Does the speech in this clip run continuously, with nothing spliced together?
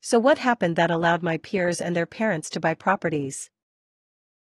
yes; 0 cuts

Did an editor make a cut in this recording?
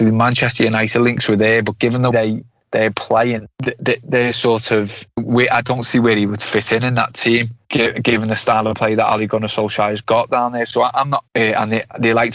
yes; 3 cuts; at 2.1 s, 5.2 s, 11.3 s

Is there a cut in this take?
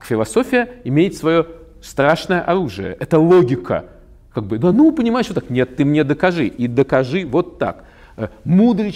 no; 0 cuts

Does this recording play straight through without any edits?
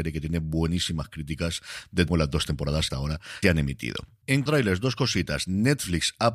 no; 4 cuts; at 2.1 s, 2.9 s, 3.4 s, 4.5 s

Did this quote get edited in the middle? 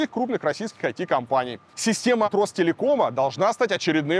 yes; 1 cut; at 2.2 s

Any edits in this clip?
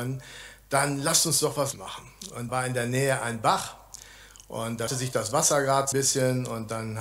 yes; 4 cuts; at 1.7 s, 2.5 s, 4.9 s, 5.9 s

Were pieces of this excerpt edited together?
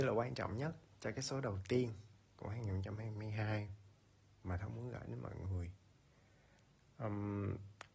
no; 0 cuts

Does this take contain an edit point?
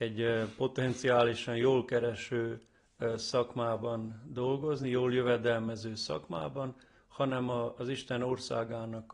no; 0 cuts

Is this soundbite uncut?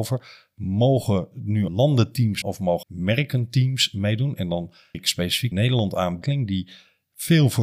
no; 6 cuts; at 1.7 s, 2.4 s, 2.8 s, 4.9 s, 5.5 s, 6.2 s

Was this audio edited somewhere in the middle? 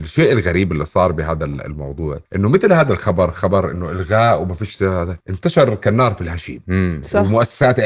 yes; 2 cuts; at 2.3 s, 5.2 s

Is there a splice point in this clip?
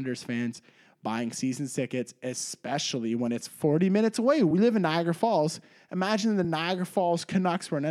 no; 0 cuts

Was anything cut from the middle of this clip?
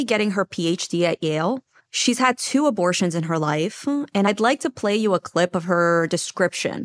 yes; 1 cut; at 1.8 s

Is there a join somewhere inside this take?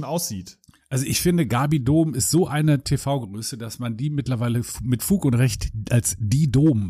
no; 0 cuts

